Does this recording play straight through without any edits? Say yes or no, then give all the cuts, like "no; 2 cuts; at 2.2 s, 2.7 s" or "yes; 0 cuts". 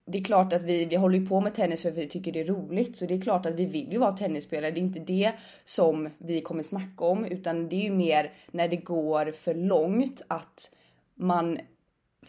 yes; 0 cuts